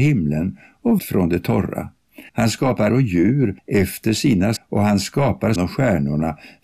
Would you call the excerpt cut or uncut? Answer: cut